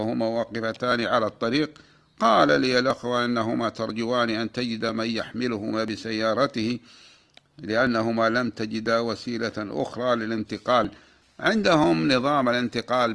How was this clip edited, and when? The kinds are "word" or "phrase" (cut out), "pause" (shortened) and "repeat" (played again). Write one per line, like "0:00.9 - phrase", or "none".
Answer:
none